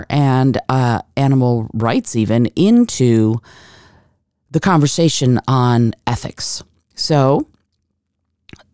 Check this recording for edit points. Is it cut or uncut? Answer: uncut